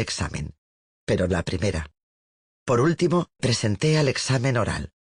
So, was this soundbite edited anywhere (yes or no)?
yes